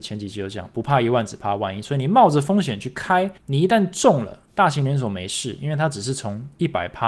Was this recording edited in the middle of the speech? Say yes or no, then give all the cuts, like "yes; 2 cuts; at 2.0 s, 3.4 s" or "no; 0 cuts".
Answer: yes; 2 cuts; at 3.4 s, 4.4 s